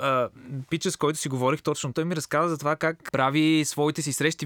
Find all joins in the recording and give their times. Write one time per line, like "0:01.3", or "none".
0:01.9
0:03.1

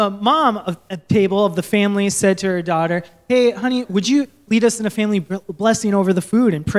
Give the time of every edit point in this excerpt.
none

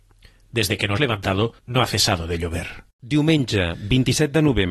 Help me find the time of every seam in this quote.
0:01.0
0:01.6
0:02.9

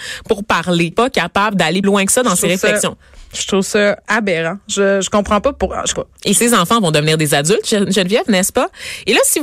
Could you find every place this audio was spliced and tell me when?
0:00.9
0:01.8
0:05.9

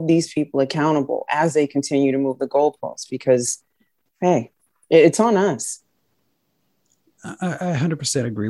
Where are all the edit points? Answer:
none

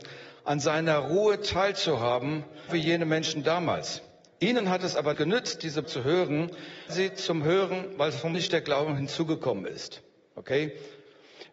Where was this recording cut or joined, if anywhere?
0:02.7
0:05.1
0:05.8
0:06.9
0:08.3

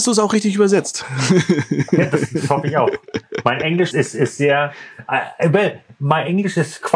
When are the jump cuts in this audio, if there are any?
0:03.9

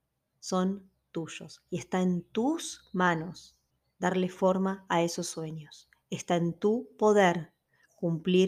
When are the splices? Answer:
0:03.7

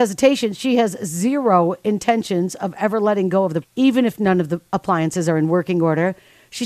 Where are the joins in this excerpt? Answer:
0:03.6

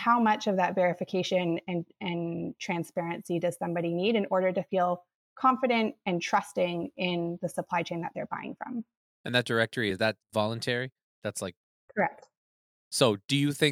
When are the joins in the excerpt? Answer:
none

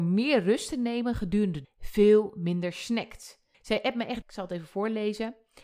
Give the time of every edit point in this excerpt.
0:01.6
0:03.5
0:04.2

